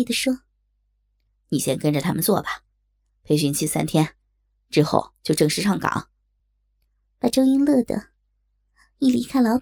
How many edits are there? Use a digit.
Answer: 1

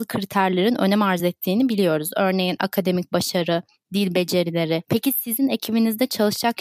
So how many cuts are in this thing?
0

